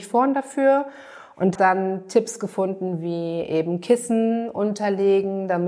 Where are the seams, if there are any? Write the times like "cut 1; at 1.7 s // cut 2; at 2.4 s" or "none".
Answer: cut 1; at 1.6 s